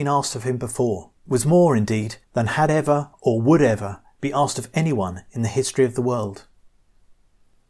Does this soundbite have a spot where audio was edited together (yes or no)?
yes